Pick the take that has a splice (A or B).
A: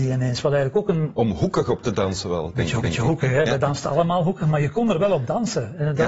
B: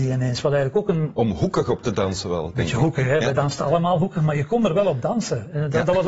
A